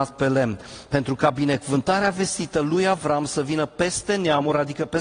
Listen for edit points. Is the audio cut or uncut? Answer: uncut